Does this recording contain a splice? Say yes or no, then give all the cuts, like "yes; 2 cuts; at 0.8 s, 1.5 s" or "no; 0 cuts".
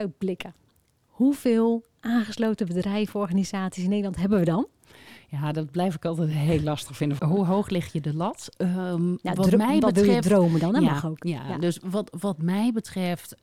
yes; 1 cut; at 7.2 s